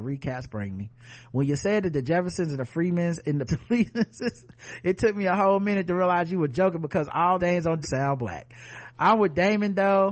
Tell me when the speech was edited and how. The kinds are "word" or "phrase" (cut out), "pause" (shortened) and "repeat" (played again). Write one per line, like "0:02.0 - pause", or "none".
0:03.5 - word
0:07.4 - word
0:07.8 - phrase